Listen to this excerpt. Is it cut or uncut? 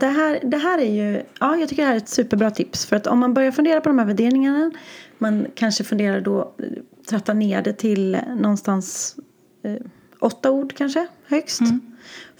uncut